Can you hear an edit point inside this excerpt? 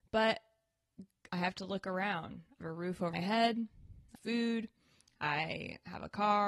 yes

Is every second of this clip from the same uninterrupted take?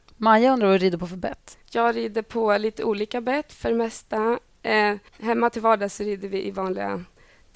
no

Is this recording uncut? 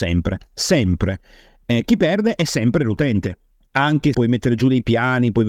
no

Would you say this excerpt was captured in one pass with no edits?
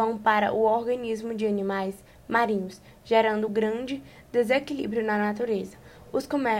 yes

